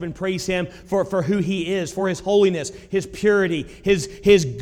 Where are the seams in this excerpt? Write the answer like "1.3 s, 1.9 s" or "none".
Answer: none